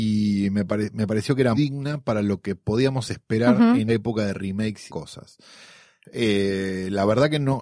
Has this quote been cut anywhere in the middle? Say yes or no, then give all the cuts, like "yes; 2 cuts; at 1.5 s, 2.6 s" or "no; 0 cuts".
yes; 3 cuts; at 1.5 s, 3.9 s, 4.9 s